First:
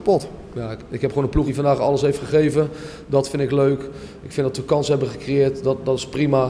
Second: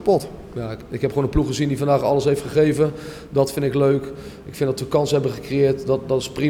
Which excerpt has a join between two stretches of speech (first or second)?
first